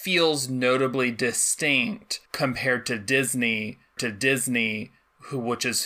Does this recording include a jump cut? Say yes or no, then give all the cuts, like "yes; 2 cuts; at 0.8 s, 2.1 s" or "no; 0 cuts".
yes; 2 cuts; at 2.3 s, 4.0 s